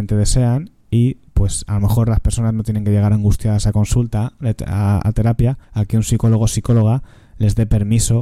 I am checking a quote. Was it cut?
yes; 1 cut; at 5.6 s

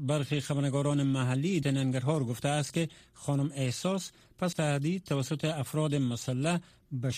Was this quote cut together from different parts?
yes; 2 cuts; at 1.6 s, 4.5 s

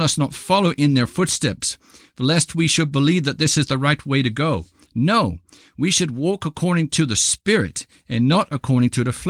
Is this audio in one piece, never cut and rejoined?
yes; 0 cuts

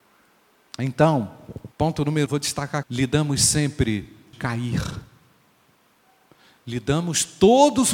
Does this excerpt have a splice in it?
yes; 4 cuts; at 1.7 s, 2.3 s, 2.8 s, 4.3 s

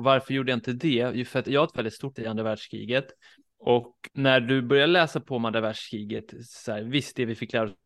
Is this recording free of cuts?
no; 3 cuts; at 1.5 s, 2.2 s, 4.1 s

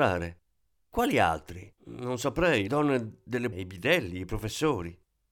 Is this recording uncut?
no; 3 cuts; at 1.8 s, 2.7 s, 3.5 s

